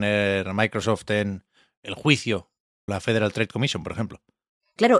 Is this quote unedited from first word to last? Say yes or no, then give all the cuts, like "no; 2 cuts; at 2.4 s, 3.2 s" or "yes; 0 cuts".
no; 1 cut; at 2.9 s